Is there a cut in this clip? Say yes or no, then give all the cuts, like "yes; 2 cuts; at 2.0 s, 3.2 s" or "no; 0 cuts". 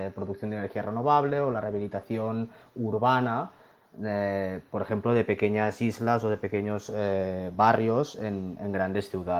no; 0 cuts